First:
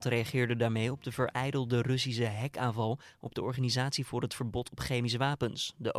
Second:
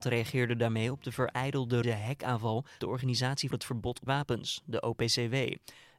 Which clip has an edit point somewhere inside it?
second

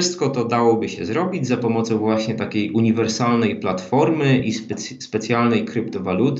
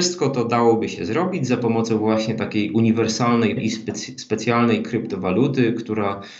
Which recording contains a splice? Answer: second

